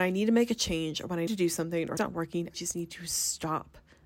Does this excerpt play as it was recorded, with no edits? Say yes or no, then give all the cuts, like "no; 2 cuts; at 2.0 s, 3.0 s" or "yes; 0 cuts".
no; 3 cuts; at 1.3 s, 2.0 s, 2.5 s